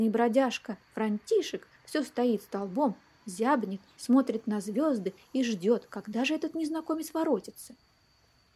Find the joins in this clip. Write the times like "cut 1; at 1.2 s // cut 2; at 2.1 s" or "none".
none